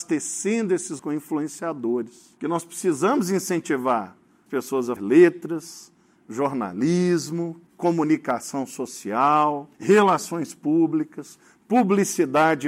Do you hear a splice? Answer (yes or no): yes